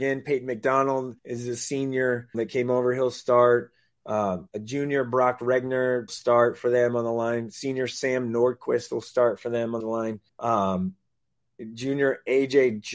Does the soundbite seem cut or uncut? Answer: cut